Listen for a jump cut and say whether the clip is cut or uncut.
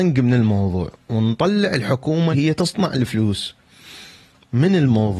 cut